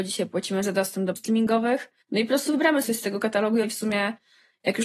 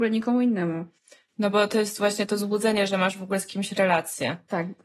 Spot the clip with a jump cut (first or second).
first